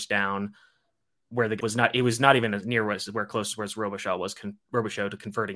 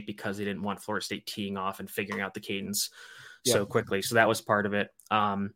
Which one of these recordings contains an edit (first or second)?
first